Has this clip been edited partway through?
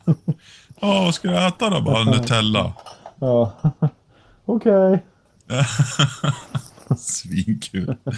no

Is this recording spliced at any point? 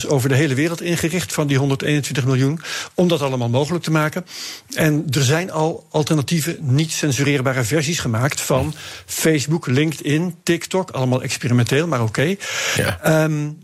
no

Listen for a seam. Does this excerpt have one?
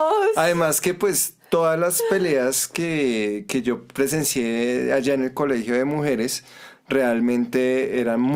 no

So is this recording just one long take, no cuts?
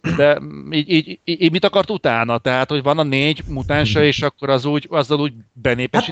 yes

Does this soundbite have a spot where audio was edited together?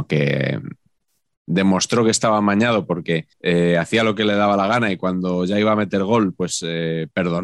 yes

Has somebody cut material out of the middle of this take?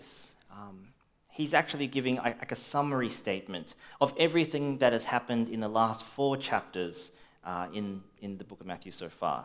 no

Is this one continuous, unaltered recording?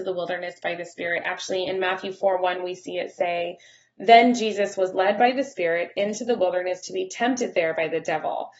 yes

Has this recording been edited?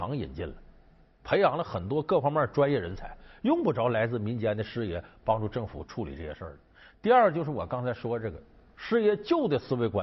no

